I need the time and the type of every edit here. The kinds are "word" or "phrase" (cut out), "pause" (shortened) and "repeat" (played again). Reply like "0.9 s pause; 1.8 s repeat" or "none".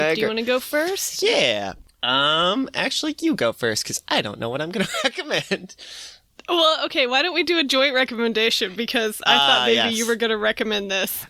none